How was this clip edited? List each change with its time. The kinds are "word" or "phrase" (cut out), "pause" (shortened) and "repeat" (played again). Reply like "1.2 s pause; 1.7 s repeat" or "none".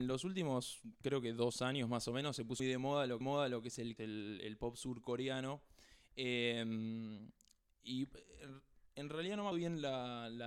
2.6 s word; 3.2 s repeat; 4.0 s phrase; 9.5 s word